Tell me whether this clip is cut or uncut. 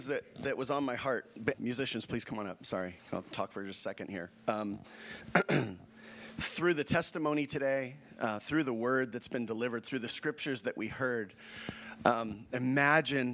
cut